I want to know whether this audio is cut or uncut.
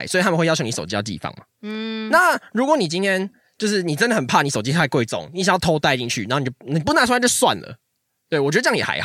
uncut